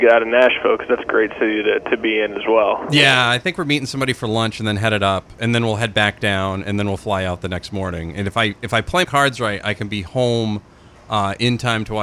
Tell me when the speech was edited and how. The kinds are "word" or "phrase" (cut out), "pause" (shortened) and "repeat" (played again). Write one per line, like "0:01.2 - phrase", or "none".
0:09.0 - word